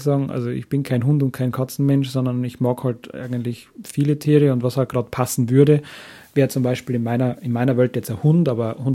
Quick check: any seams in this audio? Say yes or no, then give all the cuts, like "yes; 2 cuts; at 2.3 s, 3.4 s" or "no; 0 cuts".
no; 0 cuts